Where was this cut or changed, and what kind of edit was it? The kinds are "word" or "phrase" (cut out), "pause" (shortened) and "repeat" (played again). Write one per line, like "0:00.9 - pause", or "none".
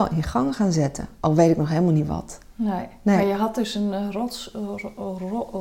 none